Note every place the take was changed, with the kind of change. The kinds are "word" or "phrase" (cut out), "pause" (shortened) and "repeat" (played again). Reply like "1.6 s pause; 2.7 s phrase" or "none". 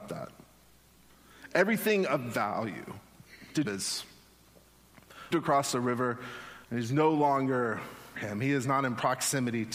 3.6 s word; 5.3 s word; 6.6 s pause; 8.2 s word